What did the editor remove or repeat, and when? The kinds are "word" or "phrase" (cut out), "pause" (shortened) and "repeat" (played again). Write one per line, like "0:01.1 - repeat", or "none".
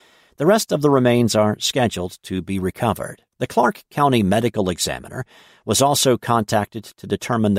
0:03.3 - pause